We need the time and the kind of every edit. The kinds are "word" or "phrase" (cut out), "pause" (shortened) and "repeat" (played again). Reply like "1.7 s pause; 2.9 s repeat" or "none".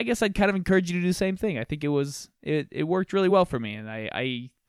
none